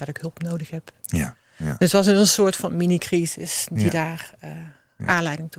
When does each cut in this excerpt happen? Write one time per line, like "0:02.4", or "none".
0:01.4